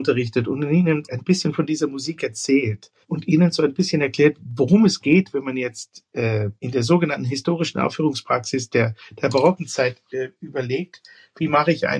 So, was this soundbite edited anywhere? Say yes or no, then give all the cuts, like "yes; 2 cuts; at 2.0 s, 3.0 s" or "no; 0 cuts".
yes; 2 cuts; at 3.0 s, 6.6 s